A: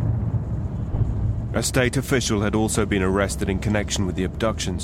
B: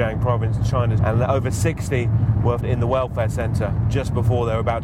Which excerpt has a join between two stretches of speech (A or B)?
B